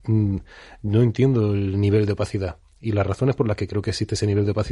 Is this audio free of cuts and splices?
yes; 0 cuts

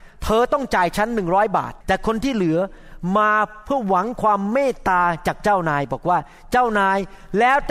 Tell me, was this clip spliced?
yes; 1 cut; at 1.8 s

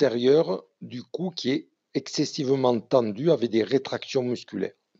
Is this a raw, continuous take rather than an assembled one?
yes; 0 cuts

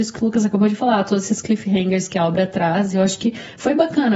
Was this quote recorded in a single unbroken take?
yes; 0 cuts

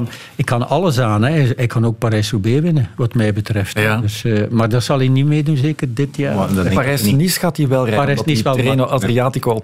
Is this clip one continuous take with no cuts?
yes; 0 cuts

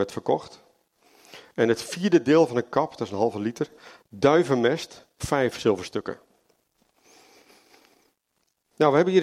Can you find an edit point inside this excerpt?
yes; 1 cut; at 5.2 s

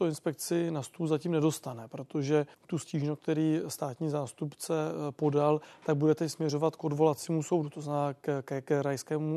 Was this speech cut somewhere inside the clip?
yes; 1 cut; at 2.5 s

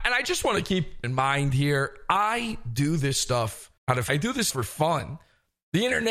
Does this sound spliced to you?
yes; 4 cuts; at 1.0 s, 3.8 s, 4.1 s, 4.5 s

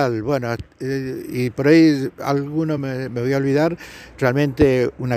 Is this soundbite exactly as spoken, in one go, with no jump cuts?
yes; 0 cuts

